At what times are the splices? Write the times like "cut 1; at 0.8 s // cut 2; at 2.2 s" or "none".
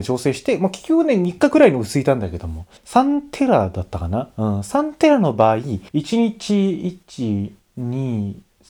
cut 1; at 2.8 s // cut 2; at 5.9 s